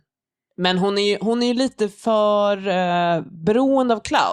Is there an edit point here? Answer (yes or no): no